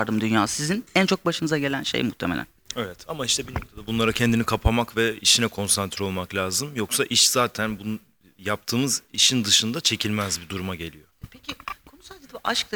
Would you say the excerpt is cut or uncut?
uncut